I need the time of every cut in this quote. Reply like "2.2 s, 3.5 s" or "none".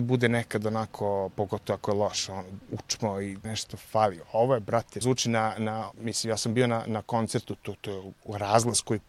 2.6 s, 3.4 s, 5.0 s